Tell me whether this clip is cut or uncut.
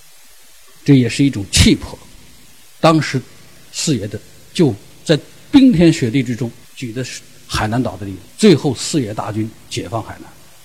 cut